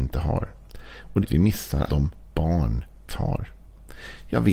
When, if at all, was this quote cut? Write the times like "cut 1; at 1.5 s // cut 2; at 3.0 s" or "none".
cut 1; at 1.2 s // cut 2; at 1.9 s // cut 3; at 2.3 s // cut 4; at 3.1 s